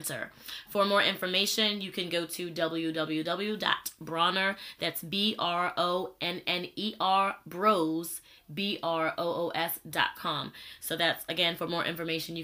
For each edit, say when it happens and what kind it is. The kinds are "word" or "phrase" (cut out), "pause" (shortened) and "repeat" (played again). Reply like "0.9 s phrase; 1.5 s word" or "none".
none